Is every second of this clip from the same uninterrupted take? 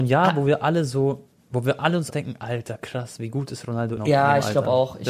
no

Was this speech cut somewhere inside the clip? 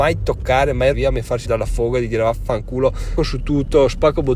yes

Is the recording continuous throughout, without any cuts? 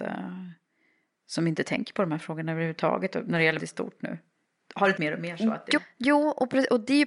no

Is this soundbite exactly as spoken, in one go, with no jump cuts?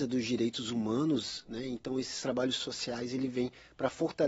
yes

